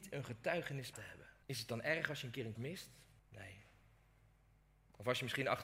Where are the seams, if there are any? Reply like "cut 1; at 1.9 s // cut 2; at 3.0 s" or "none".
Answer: cut 1; at 0.9 s // cut 2; at 1.4 s // cut 3; at 2.6 s // cut 4; at 3.2 s